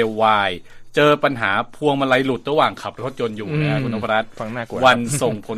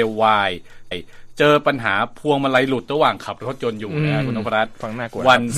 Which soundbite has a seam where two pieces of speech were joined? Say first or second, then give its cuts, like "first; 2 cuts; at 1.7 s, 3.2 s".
second; 1 cut; at 0.9 s